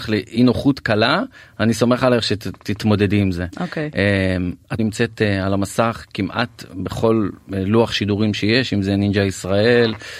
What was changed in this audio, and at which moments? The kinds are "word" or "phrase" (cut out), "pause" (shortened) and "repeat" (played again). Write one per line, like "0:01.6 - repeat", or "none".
0:04.8 - word

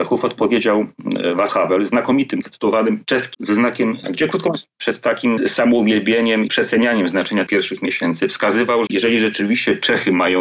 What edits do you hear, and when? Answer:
0:01.5 - word
0:02.4 - word
0:03.3 - word
0:04.0 - word
0:04.7 - word
0:06.5 - word
0:07.5 - word
0:08.9 - word

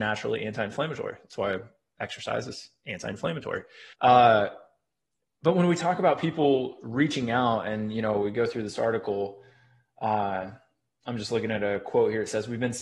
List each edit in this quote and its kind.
0:03.9 - pause

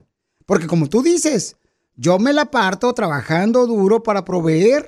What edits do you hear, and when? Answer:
none

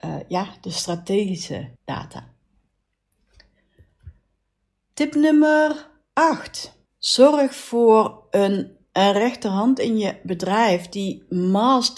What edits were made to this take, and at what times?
0:01.8 - pause
0:06.9 - pause

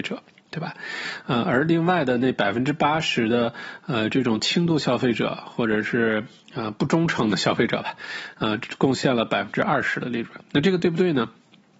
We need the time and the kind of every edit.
none

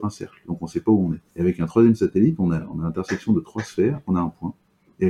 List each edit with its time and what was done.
0:01.3 - pause
0:04.0 - phrase

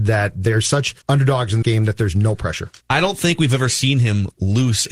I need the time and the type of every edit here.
0:01.0 - pause
0:01.6 - word
0:02.8 - pause

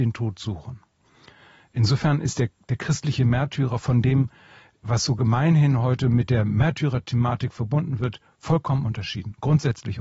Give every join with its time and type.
none

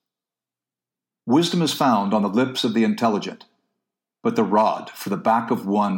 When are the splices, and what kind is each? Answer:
none

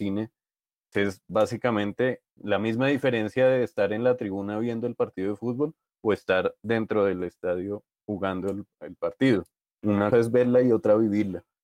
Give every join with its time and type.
0:00.9 - word
0:02.4 - word
0:10.1 - word

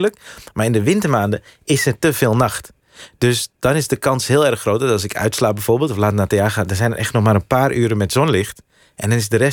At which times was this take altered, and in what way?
none

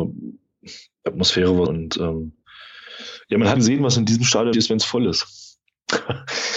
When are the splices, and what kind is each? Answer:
0:01.6 - word
0:03.5 - word
0:04.5 - word

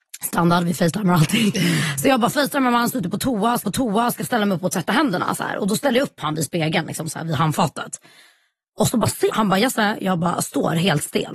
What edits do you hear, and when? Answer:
0:03.6 - repeat
0:09.3 - word

